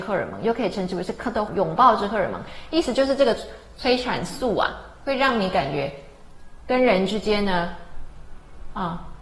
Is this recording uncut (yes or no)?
no